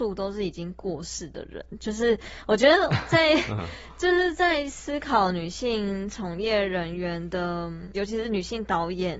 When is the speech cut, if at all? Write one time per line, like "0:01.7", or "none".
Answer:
0:07.9